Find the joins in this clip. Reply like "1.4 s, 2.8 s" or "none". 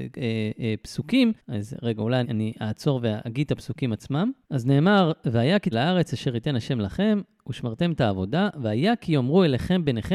1.4 s, 2.2 s, 4.4 s, 5.7 s